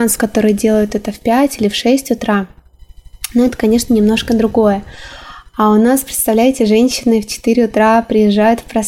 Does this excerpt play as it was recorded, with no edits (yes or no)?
yes